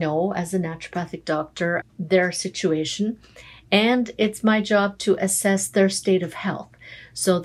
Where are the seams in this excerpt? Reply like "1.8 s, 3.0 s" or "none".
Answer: 1.8 s